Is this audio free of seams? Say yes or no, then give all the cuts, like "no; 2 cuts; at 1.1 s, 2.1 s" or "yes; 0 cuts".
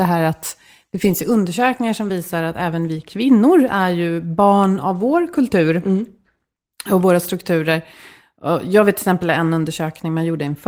yes; 0 cuts